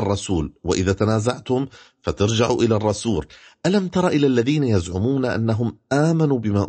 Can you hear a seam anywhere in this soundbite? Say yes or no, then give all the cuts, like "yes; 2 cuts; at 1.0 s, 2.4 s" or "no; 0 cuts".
no; 0 cuts